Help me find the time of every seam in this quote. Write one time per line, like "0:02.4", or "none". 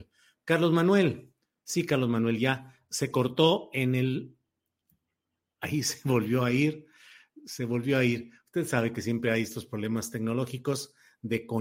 none